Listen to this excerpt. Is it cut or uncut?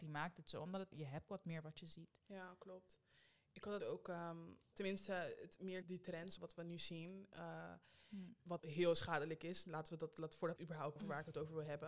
cut